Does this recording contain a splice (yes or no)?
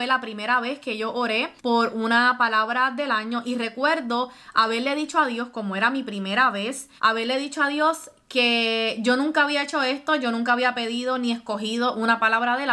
yes